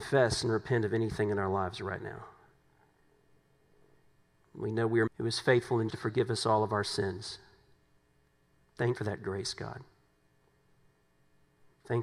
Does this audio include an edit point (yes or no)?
yes